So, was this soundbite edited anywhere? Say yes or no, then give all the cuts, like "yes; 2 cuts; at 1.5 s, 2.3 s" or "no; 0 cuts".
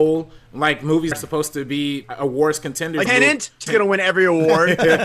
yes; 4 cuts; at 1.1 s, 2.0 s, 3.1 s, 3.7 s